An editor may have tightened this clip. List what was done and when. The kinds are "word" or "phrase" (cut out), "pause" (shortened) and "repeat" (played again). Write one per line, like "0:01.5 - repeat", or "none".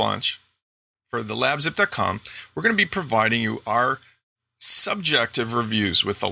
none

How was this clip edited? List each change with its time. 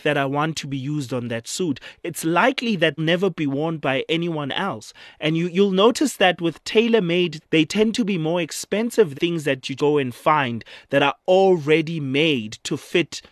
0:03.0 - phrase
0:07.4 - word
0:09.1 - word
0:09.8 - word

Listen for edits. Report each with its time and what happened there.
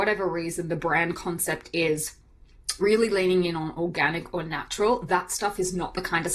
0:02.8 - word

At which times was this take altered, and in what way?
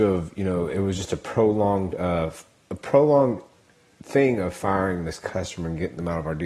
none

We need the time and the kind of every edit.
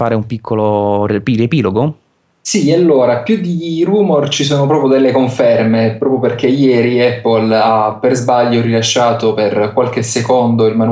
none

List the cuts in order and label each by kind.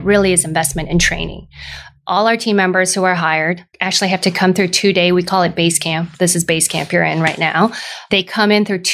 0:03.7 - pause
0:06.1 - pause

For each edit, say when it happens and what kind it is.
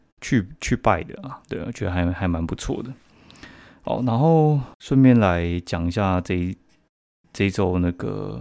0:04.7 - pause

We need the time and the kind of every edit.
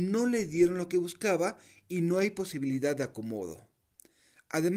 none

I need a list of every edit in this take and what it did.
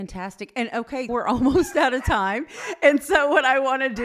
0:01.1 - word

